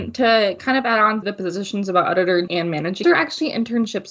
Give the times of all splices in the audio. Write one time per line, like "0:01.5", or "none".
0:01.2
0:02.5
0:03.0